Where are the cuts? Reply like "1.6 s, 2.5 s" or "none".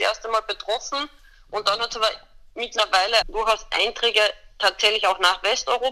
3.2 s